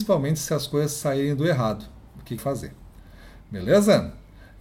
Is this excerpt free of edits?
no; 1 cut; at 2.4 s

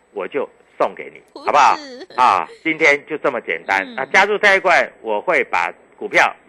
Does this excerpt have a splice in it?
yes; 1 cut; at 1.3 s

